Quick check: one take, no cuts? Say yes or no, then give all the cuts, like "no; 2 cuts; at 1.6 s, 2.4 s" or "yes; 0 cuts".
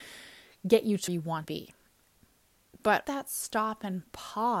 no; 3 cuts; at 1.1 s, 1.4 s, 3.0 s